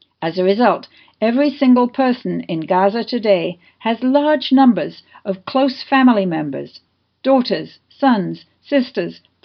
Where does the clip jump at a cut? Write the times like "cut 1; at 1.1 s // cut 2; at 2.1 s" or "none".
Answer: none